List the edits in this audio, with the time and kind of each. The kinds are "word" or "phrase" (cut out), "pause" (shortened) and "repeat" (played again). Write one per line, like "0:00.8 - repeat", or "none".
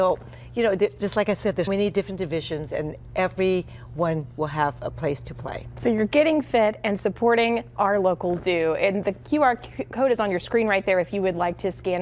0:01.7 - word